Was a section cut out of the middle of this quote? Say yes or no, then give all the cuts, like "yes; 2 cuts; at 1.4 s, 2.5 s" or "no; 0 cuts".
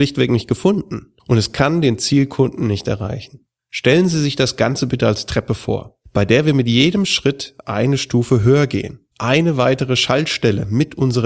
yes; 4 cuts; at 1.2 s, 3.6 s, 6.1 s, 9.1 s